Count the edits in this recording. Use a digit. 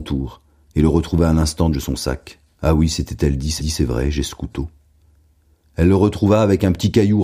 3